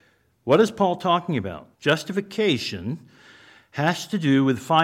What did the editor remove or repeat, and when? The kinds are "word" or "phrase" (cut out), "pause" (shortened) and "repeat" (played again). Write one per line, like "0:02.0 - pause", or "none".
0:01.7 - pause